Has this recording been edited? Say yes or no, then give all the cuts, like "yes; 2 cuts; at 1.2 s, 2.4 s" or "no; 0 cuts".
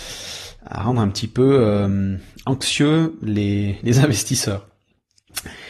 no; 0 cuts